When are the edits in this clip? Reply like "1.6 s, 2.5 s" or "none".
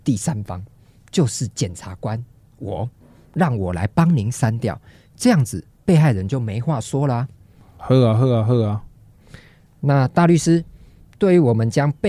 none